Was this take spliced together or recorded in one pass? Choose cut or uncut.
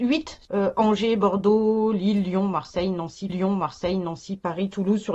cut